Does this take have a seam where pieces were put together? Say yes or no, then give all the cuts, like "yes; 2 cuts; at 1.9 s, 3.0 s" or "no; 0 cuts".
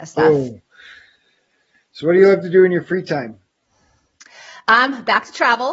no; 0 cuts